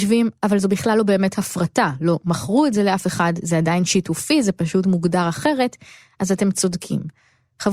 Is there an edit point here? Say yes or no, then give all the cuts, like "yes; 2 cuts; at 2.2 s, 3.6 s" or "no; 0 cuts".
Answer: no; 0 cuts